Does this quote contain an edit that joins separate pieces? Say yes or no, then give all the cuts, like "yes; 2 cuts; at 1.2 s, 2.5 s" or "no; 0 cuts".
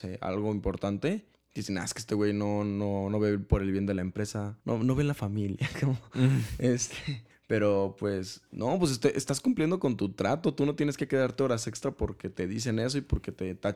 yes; 3 cuts; at 1.3 s, 4.6 s, 7.3 s